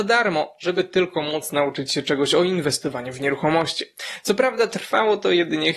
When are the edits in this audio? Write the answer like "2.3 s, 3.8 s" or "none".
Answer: none